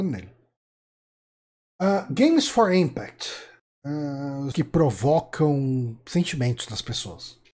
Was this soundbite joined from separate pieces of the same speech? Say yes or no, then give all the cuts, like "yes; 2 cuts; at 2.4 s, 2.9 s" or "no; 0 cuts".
yes; 1 cut; at 4.5 s